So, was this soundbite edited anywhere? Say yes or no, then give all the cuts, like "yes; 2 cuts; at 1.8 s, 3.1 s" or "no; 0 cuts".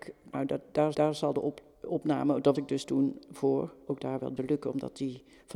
yes; 5 cuts; at 0.9 s, 1.7 s, 2.5 s, 3.9 s, 4.4 s